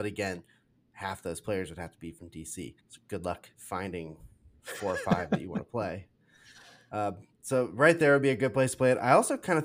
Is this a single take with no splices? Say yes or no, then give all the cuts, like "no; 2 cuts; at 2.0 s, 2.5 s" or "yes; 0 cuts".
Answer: no; 3 cuts; at 2.8 s, 3.5 s, 7.3 s